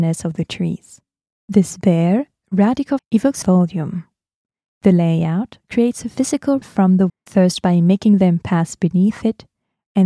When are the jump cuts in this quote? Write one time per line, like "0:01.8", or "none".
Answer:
0:03.0
0:03.4
0:06.6
0:07.1